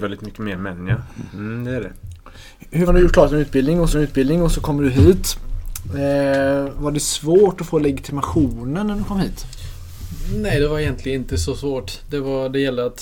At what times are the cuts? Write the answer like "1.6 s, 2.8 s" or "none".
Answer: 2.9 s, 3.9 s, 6.7 s

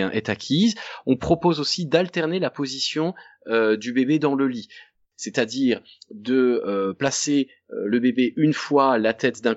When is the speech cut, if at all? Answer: none

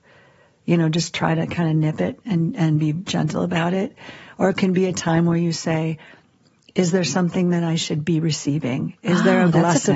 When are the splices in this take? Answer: none

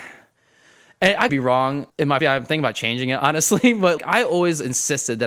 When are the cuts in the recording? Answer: 1.3 s, 1.9 s, 2.2 s, 4.0 s

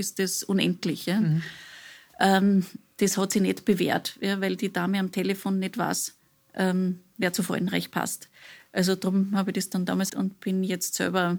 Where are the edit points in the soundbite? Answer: 6.2 s, 10.1 s

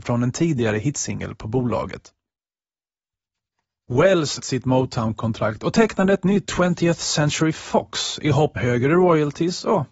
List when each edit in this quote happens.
4.4 s, 6.4 s, 8.6 s

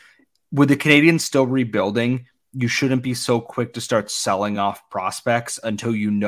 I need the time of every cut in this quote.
none

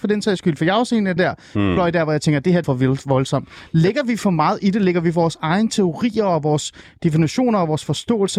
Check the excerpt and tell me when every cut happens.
1.2 s, 2.6 s

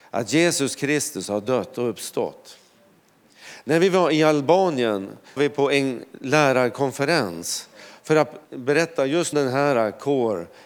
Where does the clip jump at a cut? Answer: 5.4 s, 8.4 s, 9.3 s

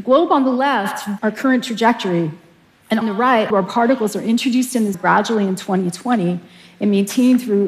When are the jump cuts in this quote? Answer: 1.2 s, 3.0 s, 3.5 s, 4.9 s

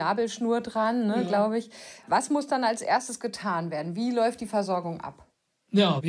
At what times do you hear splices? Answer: none

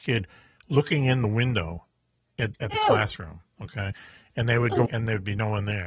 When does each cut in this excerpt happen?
2.5 s, 4.9 s

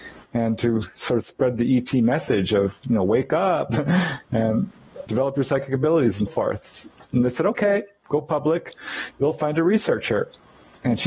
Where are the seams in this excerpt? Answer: 5.1 s, 6.3 s

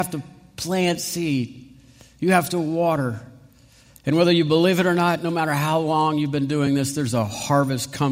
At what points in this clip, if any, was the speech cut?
none

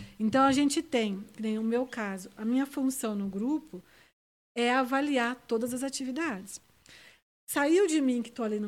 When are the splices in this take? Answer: none

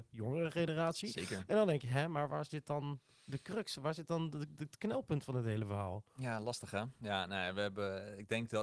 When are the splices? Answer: none

